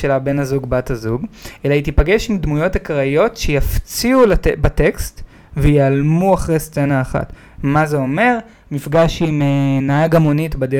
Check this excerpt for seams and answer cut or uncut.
uncut